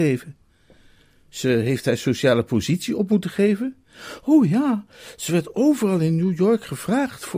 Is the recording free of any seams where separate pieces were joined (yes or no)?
yes